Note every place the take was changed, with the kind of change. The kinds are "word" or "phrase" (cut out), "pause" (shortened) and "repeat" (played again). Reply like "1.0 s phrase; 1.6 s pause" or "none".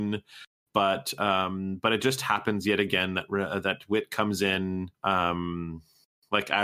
4.9 s pause